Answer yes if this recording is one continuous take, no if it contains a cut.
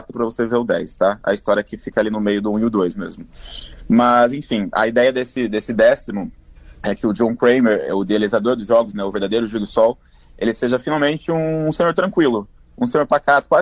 yes